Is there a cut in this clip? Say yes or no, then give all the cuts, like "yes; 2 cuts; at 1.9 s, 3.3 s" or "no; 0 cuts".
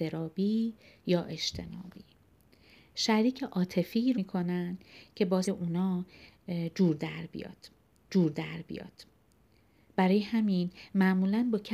yes; 3 cuts; at 4.1 s, 5.4 s, 8.1 s